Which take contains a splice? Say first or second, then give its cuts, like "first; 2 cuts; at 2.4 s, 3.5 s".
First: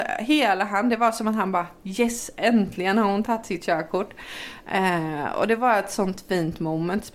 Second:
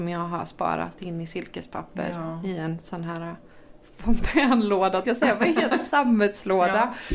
second; 2 cuts; at 1.0 s, 5.0 s